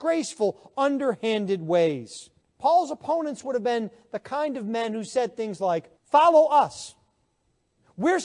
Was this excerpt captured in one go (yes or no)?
no